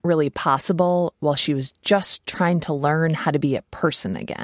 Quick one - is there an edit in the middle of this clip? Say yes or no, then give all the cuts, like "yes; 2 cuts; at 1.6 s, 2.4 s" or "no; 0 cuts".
no; 0 cuts